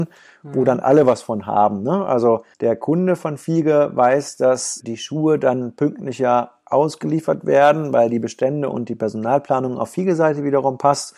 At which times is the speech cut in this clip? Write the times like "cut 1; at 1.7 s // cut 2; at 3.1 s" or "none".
cut 1; at 2.5 s // cut 2; at 4.8 s